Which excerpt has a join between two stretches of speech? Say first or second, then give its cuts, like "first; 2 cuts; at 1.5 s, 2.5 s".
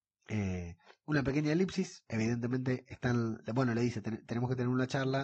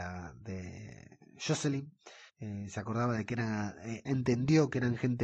second; 2 cuts; at 2.3 s, 4.0 s